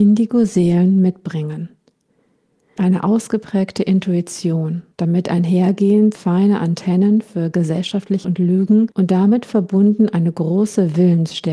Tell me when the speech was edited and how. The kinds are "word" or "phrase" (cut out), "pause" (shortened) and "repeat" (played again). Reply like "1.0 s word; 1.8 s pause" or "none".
2.8 s word; 4.9 s pause; 6.1 s word; 8.2 s word; 8.9 s pause